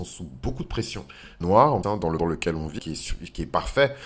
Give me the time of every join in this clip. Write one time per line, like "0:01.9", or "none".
0:01.4
0:01.8
0:02.2
0:02.8